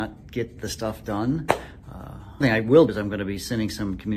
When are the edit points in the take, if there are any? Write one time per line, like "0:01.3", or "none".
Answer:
0:02.4
0:02.9